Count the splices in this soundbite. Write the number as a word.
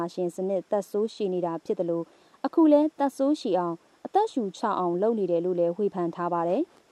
zero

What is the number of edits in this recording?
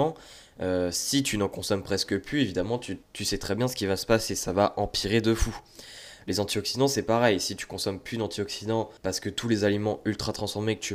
two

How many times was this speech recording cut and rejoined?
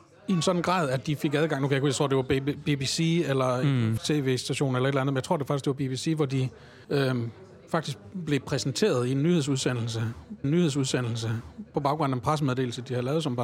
three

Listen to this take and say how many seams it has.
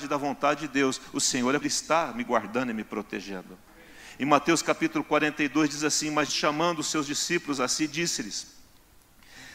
three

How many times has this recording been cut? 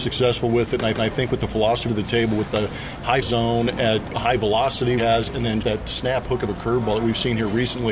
six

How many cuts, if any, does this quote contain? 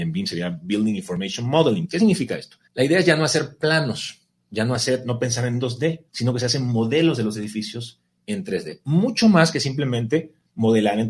two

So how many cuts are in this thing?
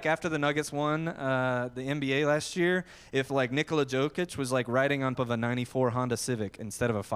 one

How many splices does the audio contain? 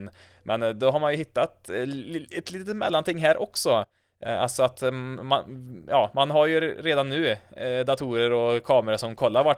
zero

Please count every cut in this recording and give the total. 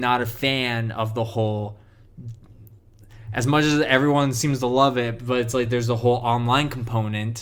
zero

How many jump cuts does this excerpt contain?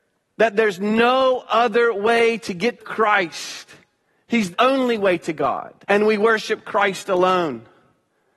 three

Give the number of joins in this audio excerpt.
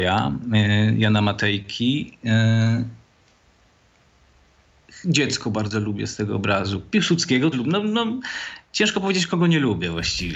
one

